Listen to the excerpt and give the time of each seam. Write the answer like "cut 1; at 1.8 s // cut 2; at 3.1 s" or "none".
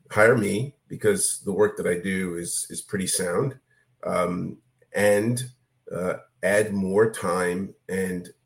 none